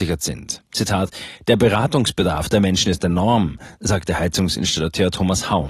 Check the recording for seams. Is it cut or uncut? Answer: uncut